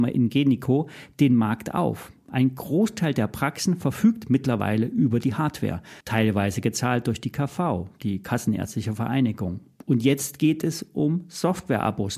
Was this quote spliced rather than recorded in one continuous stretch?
yes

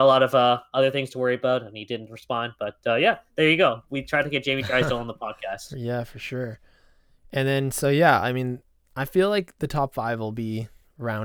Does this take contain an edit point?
no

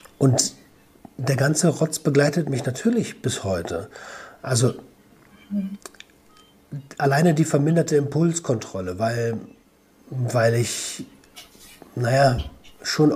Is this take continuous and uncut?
yes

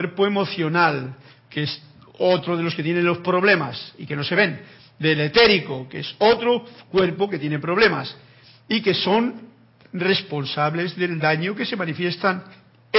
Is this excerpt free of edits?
yes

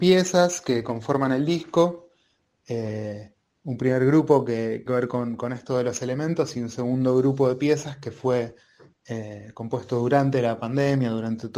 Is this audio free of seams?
no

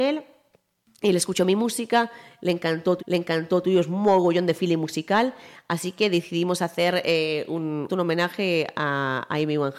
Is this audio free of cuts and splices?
no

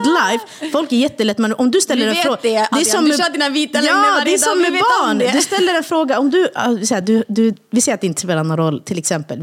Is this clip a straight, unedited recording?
yes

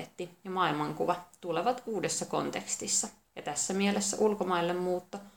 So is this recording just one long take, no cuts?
no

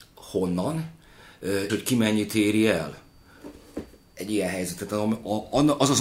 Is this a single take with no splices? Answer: no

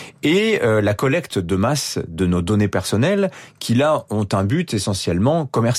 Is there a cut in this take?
no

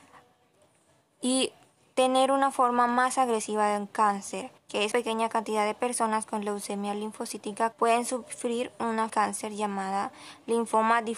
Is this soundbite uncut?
no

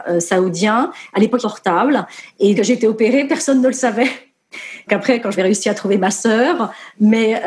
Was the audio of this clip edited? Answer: yes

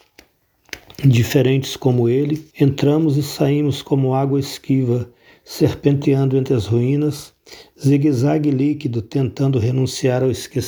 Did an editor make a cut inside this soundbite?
yes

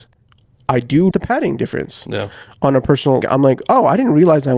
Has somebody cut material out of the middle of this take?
yes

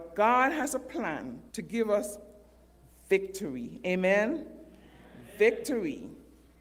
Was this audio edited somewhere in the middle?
yes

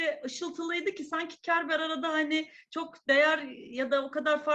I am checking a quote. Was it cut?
no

